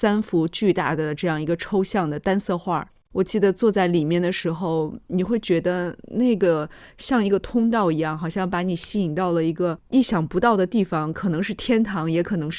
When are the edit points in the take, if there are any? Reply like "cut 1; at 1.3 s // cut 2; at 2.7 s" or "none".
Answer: none